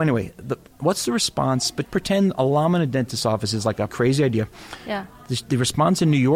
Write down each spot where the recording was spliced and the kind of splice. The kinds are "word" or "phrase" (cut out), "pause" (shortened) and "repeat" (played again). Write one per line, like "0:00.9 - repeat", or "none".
0:01.8 - word
0:03.9 - word